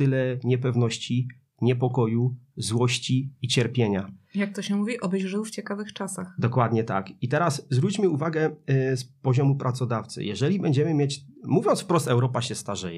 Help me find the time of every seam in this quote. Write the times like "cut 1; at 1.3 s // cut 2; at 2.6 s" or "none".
none